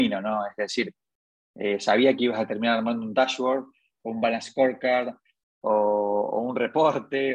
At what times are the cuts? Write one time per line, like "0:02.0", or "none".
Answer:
none

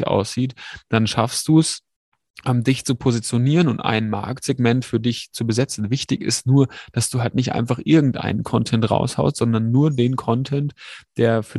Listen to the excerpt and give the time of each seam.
none

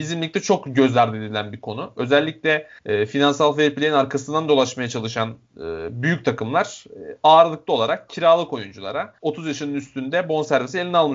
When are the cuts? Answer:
0:02.8
0:09.2

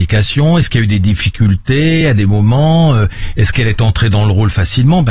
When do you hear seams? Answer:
none

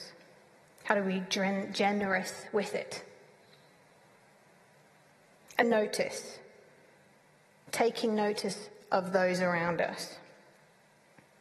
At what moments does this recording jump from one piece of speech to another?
0:05.6

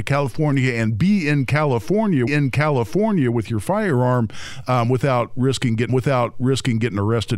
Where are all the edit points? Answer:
0:02.3
0:05.9

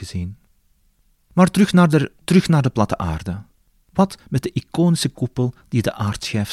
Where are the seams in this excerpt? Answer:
0:02.2
0:03.6

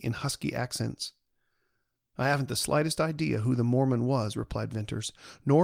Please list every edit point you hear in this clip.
none

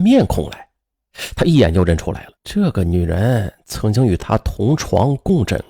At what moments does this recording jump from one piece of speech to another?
0:02.4

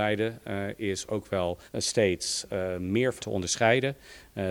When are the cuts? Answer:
0:01.7
0:03.2

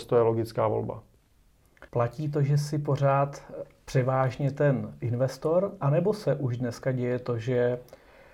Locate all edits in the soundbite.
0:01.9

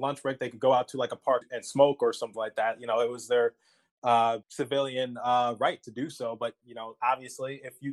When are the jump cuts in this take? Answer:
0:01.4
0:04.4

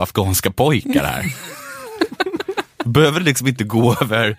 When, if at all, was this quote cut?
none

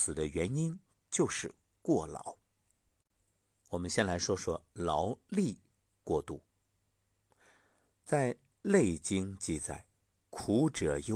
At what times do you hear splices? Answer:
none

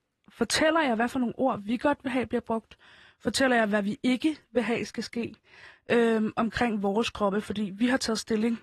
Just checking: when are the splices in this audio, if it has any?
none

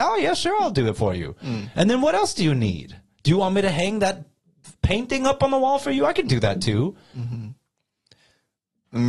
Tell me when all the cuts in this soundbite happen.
none

